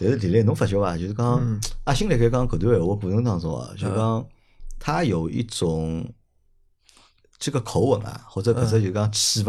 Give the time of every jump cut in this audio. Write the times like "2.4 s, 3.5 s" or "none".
none